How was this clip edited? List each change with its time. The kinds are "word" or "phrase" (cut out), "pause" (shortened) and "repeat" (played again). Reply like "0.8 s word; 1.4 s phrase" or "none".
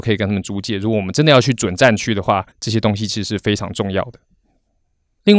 2.5 s pause